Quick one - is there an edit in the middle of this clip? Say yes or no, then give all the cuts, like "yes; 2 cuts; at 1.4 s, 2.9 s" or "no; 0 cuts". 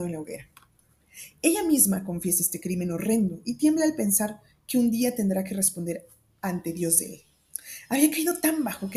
no; 0 cuts